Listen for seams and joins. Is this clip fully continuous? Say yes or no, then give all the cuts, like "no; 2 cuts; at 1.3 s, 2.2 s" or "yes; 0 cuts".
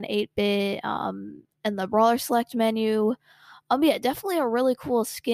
yes; 0 cuts